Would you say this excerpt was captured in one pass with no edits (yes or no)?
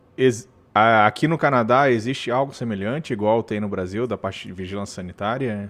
yes